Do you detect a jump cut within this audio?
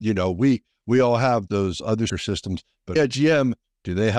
yes; 3 cuts; at 1.5 s, 2.1 s, 3.0 s

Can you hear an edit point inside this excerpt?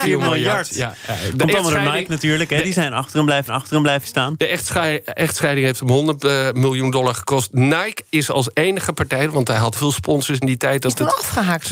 yes; 2 cuts; at 3.5 s, 9.8 s

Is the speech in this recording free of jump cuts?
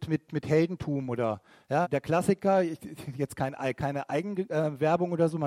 no; 1 cut; at 1.8 s

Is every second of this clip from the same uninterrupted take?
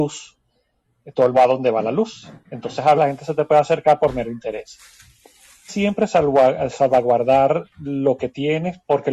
no; 3 cuts; at 1.3 s, 3.0 s, 5.7 s

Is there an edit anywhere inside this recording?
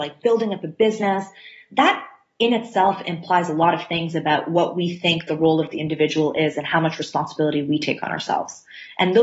no; 0 cuts

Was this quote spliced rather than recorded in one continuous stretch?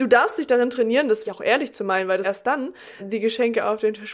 yes; 3 cuts; at 1.2 s, 2.2 s, 3.0 s

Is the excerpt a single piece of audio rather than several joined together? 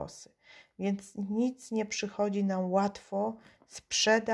yes; 0 cuts

